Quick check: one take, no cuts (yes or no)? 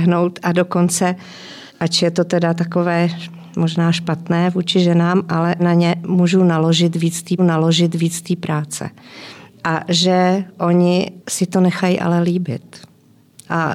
no